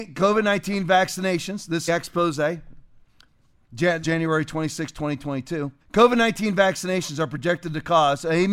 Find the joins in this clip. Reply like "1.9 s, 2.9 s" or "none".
1.9 s, 4.0 s, 5.8 s